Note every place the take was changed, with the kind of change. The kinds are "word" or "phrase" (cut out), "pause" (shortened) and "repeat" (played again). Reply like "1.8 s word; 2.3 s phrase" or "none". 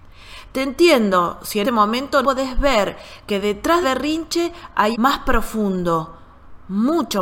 1.6 s word; 2.2 s word; 3.8 s word; 4.9 s word